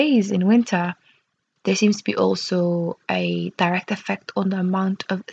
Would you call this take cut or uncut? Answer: uncut